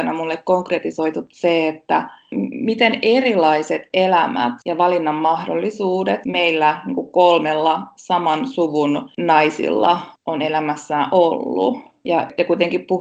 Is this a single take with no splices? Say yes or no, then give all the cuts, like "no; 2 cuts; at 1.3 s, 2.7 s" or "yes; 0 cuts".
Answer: yes; 0 cuts